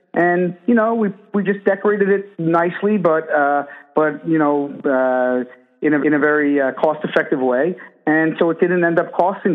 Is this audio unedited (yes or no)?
no